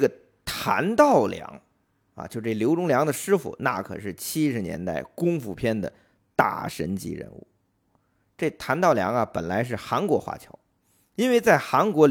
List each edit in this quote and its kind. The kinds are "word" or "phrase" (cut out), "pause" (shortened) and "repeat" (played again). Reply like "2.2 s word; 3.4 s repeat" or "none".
none